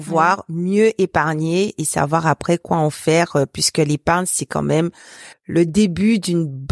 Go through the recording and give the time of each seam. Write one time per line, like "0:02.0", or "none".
0:05.3